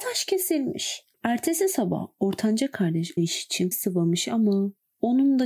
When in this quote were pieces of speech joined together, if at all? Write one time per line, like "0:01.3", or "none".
0:01.1
0:03.2
0:03.7